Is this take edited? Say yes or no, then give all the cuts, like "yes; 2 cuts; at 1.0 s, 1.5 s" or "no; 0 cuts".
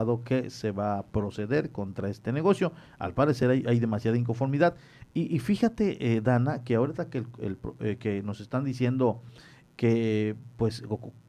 no; 0 cuts